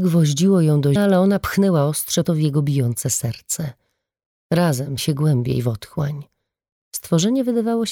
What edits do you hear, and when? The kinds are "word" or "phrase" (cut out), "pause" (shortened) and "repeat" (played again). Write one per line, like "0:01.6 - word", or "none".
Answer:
0:01.0 - word
0:02.2 - word
0:05.0 - word